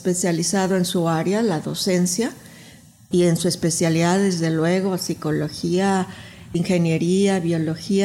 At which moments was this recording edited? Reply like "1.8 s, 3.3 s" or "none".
none